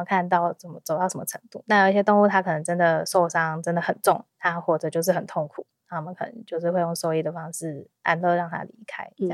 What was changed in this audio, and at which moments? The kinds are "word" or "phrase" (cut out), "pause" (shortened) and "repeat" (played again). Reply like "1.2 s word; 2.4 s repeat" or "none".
4.3 s pause; 7.9 s pause